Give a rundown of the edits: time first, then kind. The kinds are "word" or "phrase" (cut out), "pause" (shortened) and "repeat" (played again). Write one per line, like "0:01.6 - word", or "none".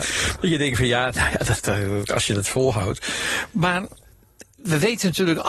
0:04.5 - pause